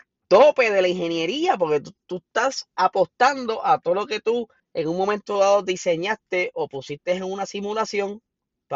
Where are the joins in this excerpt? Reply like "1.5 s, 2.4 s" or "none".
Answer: 4.6 s